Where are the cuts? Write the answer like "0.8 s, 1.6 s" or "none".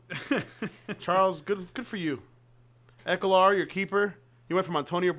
none